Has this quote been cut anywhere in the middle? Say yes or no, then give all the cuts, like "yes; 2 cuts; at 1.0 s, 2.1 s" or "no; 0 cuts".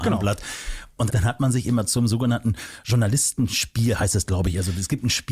yes; 1 cut; at 1.1 s